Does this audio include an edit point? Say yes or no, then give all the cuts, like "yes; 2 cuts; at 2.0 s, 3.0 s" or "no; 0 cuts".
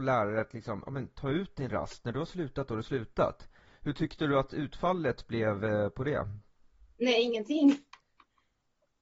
no; 0 cuts